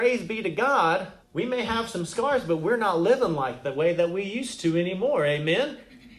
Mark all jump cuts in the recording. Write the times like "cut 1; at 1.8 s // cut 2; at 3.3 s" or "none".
cut 1; at 1.2 s